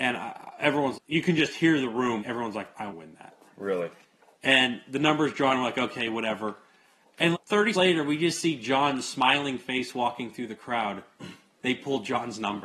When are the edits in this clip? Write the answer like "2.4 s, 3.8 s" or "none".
0.9 s, 2.2 s, 2.9 s, 7.3 s, 7.7 s